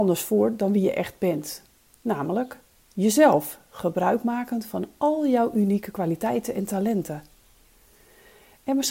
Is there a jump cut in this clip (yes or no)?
no